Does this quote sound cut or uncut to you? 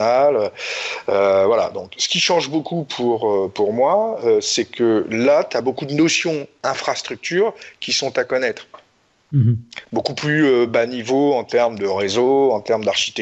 uncut